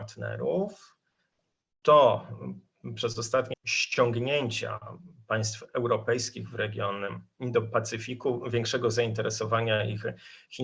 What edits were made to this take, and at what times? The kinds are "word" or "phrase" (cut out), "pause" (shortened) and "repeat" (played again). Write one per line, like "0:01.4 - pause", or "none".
0:03.5 - phrase